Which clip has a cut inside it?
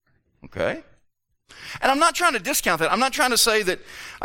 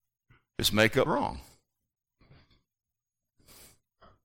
second; 1 cut; at 1.1 s

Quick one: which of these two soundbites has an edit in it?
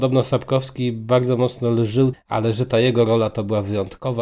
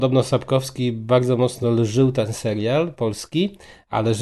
first; 1 cut; at 2.1 s

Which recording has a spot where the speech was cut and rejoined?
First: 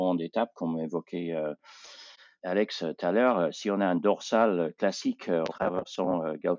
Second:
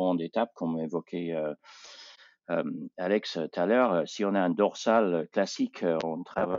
first; 2 cuts; at 2.4 s, 5.5 s

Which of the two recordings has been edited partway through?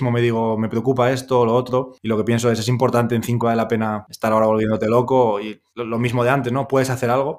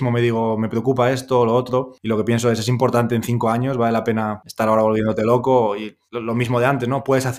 first; 1 cut; at 3.4 s

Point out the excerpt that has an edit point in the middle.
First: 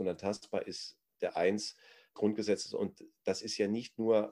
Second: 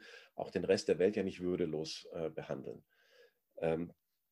first; 2 cuts; at 1.3 s, 2.2 s

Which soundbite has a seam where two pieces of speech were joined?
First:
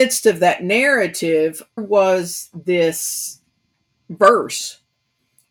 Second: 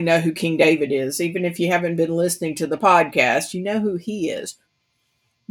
first; 2 cuts; at 1.8 s, 3.7 s

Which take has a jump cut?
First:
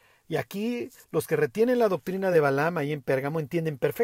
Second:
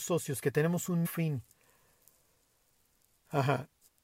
second; 1 cut; at 1.0 s

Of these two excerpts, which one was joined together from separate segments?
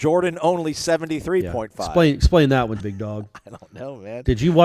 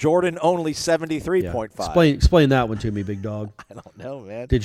first; 1 cut; at 2.8 s

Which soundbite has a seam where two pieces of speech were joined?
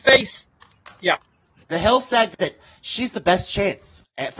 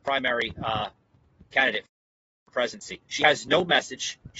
second; 1 cut; at 3.1 s

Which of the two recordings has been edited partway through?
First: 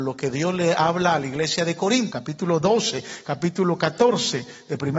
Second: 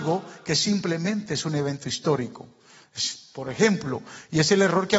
first; 1 cut; at 2.1 s

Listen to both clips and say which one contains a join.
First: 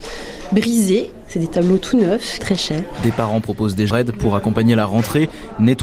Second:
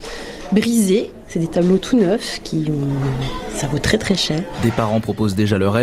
first; 2 cuts; at 2.4 s, 3.9 s

